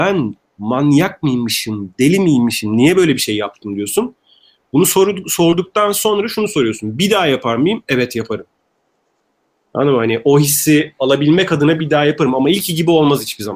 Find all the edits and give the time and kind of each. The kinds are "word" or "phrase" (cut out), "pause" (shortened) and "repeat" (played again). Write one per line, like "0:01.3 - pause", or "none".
none